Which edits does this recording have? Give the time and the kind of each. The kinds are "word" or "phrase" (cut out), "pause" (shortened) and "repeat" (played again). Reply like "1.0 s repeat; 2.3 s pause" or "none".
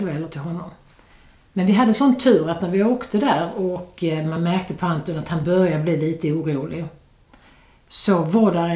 none

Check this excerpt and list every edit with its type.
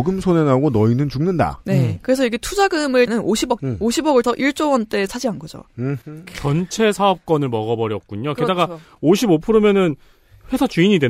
3.1 s word; 3.6 s word; 4.2 s word; 5.1 s word

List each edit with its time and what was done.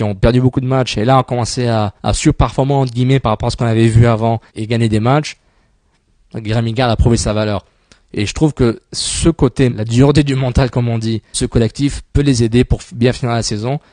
2.0 s pause; 4.5 s pause; 9.7 s word; 11.3 s phrase

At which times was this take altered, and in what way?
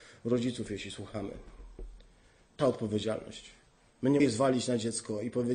2.6 s word; 4.2 s word

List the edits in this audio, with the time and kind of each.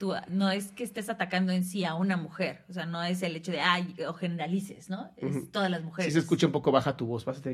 none

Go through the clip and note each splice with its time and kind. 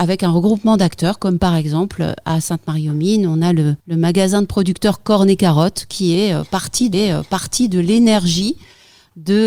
3.8 s pause; 6.9 s repeat

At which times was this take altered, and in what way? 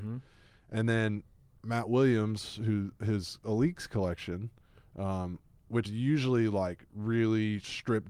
5.8 s word

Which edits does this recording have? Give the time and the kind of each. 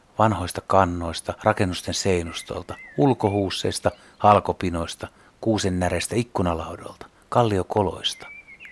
1.4 s word

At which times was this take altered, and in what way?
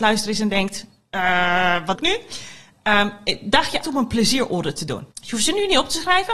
1.9 s word; 3.8 s word; 5.1 s pause

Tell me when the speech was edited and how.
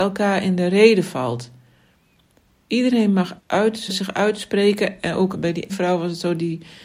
3.4 s word; 3.9 s word; 5.3 s word; 5.7 s word

